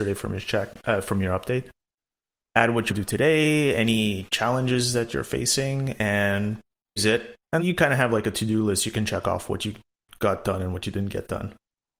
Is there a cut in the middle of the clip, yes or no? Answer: yes